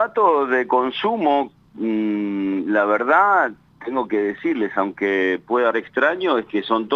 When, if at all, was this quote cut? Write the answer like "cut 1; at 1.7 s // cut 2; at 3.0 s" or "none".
cut 1; at 5.7 s